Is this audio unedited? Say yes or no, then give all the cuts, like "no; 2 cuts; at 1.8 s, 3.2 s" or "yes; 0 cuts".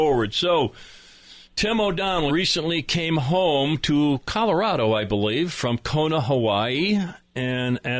no; 2 cuts; at 1.5 s, 2.3 s